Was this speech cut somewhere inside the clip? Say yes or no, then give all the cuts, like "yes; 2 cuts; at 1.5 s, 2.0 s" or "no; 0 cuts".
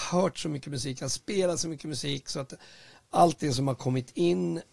no; 0 cuts